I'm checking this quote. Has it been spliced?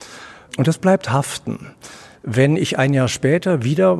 no; 0 cuts

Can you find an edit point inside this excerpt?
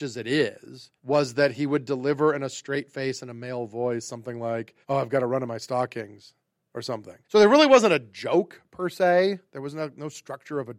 yes; 3 cuts; at 1.0 s, 4.8 s, 7.2 s

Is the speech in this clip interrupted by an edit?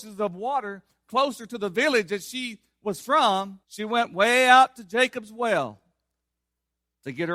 yes; 1 cut; at 3.6 s

